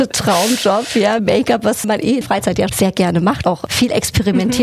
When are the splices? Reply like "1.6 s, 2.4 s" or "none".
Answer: 1.2 s, 1.8 s, 2.2 s, 2.7 s, 3.4 s

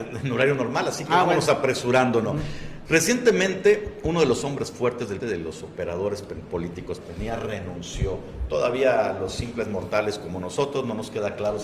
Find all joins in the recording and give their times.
5.2 s, 7.0 s

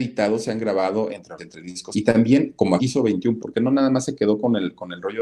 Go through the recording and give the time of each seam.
1.4 s, 1.9 s, 2.8 s, 3.4 s

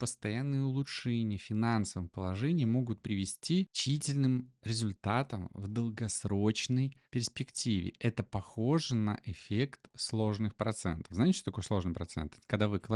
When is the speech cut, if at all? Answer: 7.0 s

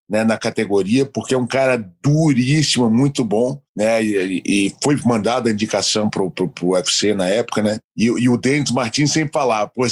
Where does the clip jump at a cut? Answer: 3.7 s

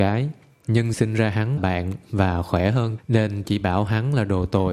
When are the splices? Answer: 0.9 s, 1.6 s, 3.0 s, 3.4 s

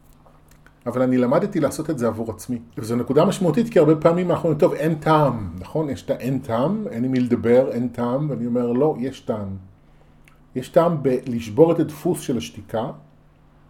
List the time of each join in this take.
2.7 s

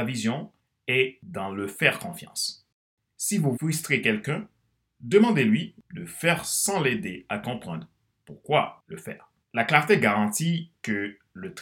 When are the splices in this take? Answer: 3.5 s, 9.4 s

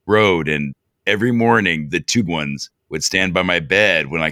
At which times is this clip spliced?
2.2 s, 2.8 s

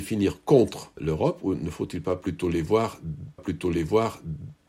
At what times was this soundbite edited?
3.4 s

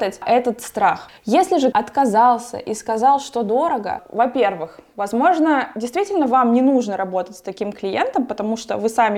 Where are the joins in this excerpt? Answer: 1.2 s, 1.7 s

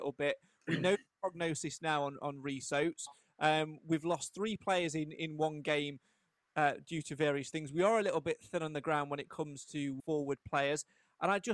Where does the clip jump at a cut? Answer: 10.0 s

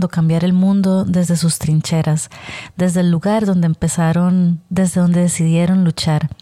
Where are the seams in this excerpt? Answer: none

